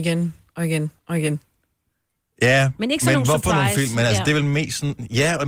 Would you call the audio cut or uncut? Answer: cut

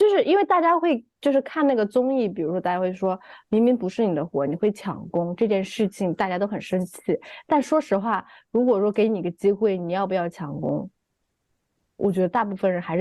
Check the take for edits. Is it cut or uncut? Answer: uncut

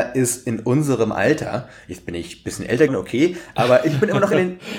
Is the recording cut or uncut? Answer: cut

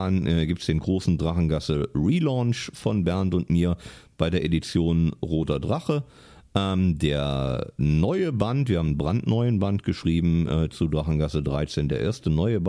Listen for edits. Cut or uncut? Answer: uncut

